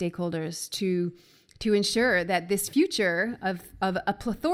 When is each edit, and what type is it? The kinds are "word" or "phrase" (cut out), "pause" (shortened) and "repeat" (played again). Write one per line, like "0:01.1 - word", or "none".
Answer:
none